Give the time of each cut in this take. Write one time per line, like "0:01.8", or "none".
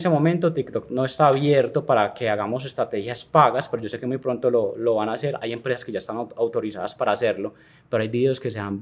none